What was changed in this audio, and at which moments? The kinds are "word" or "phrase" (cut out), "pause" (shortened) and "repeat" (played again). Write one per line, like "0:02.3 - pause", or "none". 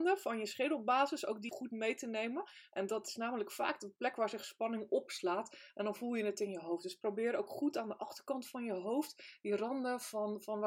0:01.5 - word